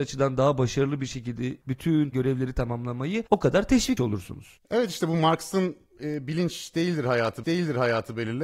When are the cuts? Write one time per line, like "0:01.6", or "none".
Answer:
0:02.1
0:03.3
0:04.0
0:07.4